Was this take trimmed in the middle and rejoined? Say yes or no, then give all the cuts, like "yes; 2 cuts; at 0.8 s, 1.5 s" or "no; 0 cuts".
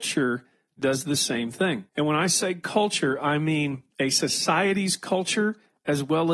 yes; 2 cuts; at 1.9 s, 3.9 s